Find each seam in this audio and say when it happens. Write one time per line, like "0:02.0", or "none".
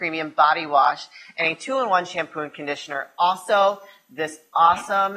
none